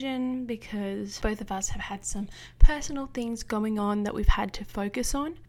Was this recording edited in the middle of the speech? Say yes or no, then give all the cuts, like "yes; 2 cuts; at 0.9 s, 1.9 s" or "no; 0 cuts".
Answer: no; 0 cuts